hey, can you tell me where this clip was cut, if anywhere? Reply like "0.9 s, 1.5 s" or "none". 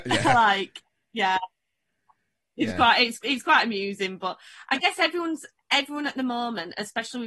none